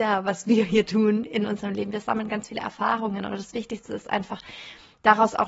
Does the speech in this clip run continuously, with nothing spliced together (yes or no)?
yes